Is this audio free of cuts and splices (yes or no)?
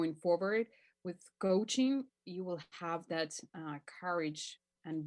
yes